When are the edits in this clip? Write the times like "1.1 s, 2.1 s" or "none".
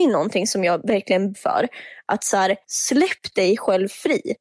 1.3 s, 2.6 s